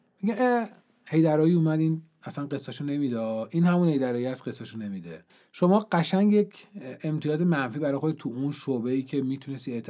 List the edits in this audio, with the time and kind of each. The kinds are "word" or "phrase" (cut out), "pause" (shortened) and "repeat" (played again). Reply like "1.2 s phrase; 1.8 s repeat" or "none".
5.3 s pause